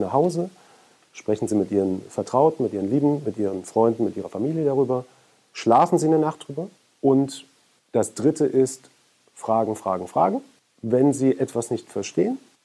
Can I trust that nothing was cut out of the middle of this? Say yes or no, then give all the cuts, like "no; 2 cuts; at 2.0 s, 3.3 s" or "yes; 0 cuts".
yes; 0 cuts